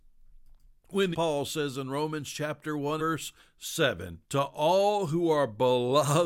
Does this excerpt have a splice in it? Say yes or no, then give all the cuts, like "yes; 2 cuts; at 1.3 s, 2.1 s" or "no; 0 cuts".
yes; 3 cuts; at 1.1 s, 3.0 s, 4.2 s